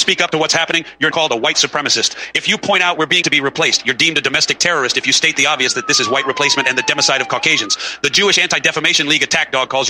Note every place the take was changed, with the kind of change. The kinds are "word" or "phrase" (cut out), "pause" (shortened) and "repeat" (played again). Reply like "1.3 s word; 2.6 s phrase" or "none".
1.1 s word; 3.2 s word